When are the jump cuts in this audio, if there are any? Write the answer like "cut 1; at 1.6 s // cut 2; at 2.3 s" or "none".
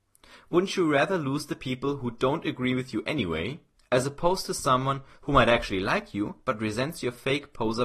none